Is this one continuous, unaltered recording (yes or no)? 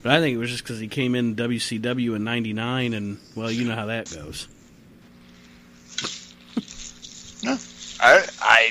yes